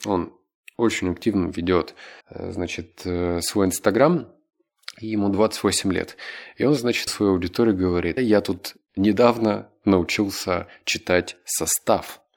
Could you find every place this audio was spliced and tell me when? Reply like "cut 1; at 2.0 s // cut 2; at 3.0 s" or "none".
cut 1; at 2.2 s // cut 2; at 7.1 s // cut 3; at 8.2 s